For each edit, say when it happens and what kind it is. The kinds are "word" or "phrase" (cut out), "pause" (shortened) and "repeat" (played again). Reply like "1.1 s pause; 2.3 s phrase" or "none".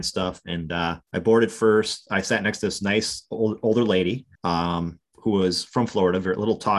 1.0 s pause; 4.4 s pause